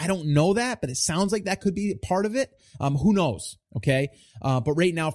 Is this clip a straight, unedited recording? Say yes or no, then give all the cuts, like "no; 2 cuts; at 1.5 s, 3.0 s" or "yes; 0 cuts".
yes; 0 cuts